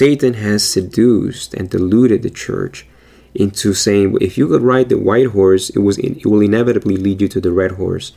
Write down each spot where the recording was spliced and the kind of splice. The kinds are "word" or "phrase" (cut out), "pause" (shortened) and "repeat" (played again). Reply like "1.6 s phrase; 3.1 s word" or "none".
none